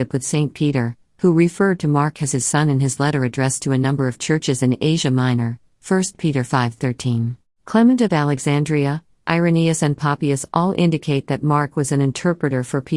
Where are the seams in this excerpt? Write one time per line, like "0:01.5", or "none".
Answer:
0:07.5